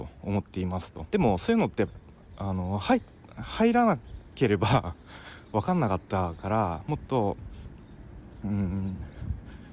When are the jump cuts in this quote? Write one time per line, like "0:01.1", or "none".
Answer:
0:01.1